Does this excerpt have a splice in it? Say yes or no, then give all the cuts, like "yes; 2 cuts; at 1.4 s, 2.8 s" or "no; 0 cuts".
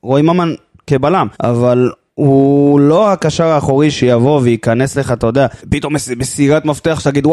yes; 2 cuts; at 1.3 s, 5.6 s